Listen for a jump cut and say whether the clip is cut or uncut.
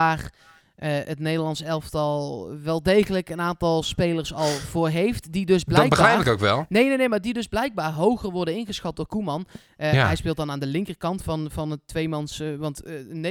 uncut